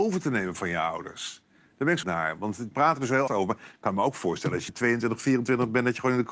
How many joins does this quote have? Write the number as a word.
four